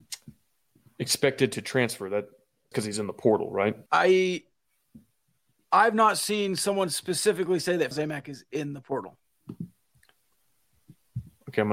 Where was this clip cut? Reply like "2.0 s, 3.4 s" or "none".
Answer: 2.7 s, 3.9 s, 7.9 s

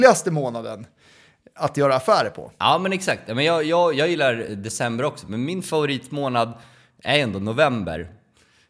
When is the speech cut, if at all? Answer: none

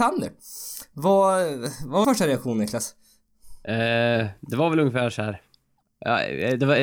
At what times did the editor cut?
2.0 s, 5.8 s

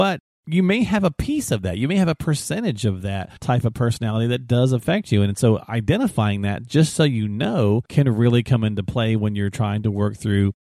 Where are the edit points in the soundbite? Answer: 3.4 s, 7.9 s

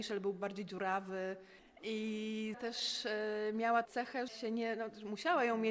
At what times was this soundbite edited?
2.5 s, 3.8 s, 4.3 s

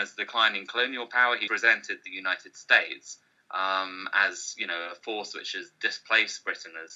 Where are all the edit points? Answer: 1.5 s

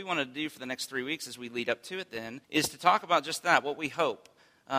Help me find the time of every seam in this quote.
2.4 s

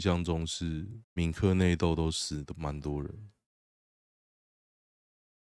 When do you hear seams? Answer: 1.0 s

